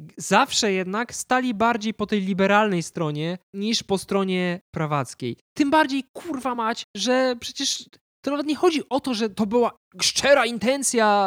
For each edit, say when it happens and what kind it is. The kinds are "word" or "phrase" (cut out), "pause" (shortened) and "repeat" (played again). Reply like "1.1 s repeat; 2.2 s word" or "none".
none